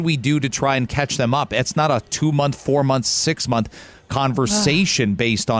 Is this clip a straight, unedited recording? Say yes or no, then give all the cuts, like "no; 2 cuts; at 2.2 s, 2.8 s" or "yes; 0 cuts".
no; 1 cut; at 1.7 s